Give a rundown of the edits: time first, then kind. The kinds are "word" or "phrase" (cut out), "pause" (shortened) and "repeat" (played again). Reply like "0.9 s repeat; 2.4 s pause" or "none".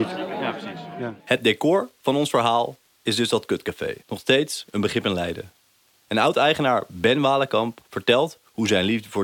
1.2 s pause; 4.0 s pause; 7.8 s pause

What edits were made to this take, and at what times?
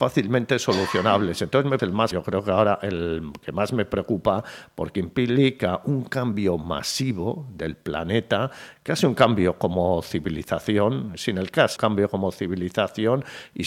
1.8 s word; 2.1 s word; 11.8 s word

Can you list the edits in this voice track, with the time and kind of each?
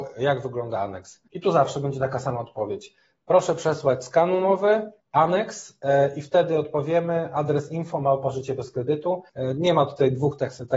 1.3 s pause; 5.0 s pause; 9.3 s pause

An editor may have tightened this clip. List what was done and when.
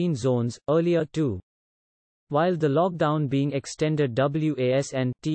none

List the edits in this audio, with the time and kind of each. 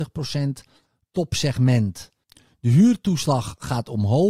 none

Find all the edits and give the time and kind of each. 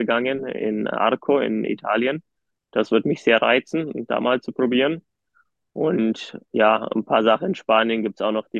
none

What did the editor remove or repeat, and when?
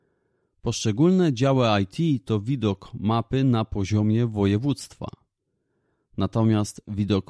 none

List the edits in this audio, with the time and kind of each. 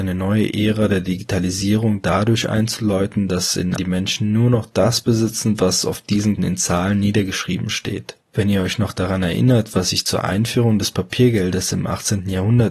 3.8 s phrase; 6.4 s word; 8.2 s pause

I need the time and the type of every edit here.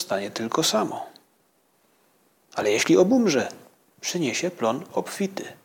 none

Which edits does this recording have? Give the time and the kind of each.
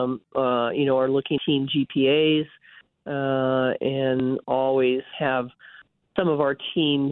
1.4 s word; 3.8 s word; 5.1 s word

